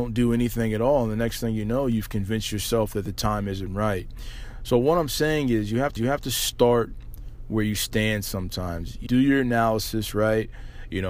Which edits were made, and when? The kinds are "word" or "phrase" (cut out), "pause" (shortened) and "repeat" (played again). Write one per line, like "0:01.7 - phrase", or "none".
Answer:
0:06.0 - repeat
0:09.1 - word